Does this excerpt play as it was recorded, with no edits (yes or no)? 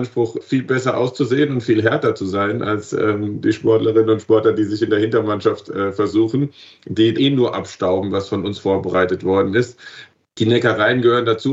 no